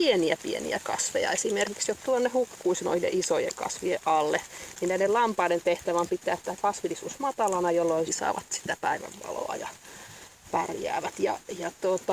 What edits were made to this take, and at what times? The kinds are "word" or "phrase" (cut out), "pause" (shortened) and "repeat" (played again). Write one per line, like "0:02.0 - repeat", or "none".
0:02.0 - word
0:08.1 - phrase